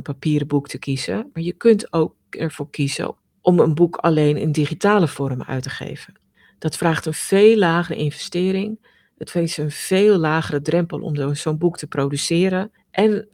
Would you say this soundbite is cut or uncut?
uncut